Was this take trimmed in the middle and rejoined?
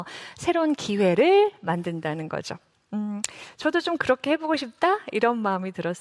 no; 0 cuts

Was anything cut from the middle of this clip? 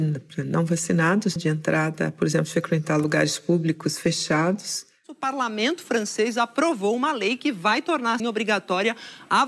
yes; 2 cuts; at 1.4 s, 8.2 s

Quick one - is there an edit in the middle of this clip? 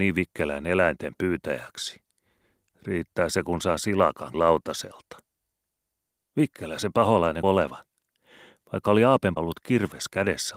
yes; 3 cuts; at 4.3 s, 7.4 s, 9.4 s

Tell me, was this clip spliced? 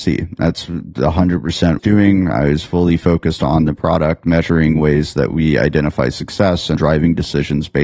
yes; 2 cuts; at 1.8 s, 6.8 s

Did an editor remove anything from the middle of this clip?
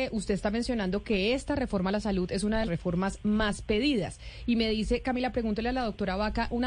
yes; 1 cut; at 2.6 s

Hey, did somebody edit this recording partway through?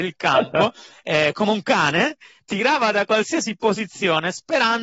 no; 0 cuts

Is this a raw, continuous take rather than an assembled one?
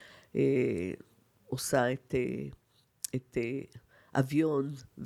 yes; 0 cuts

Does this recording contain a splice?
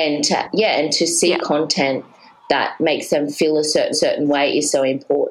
yes; 1 cut; at 3.9 s

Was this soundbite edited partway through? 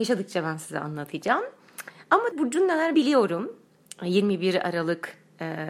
yes; 2 cuts; at 2.3 s, 2.9 s

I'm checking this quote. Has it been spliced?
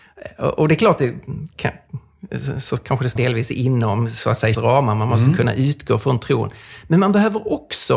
yes; 2 cuts; at 3.2 s, 4.5 s

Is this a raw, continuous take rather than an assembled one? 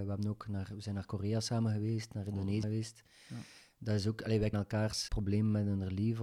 no; 3 cuts; at 2.6 s, 4.5 s, 5.1 s

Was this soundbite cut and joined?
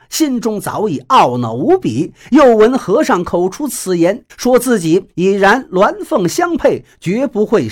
yes; 1 cut; at 4.3 s

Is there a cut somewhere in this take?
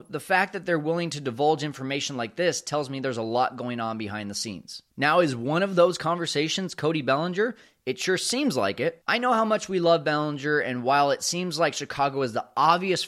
no; 0 cuts

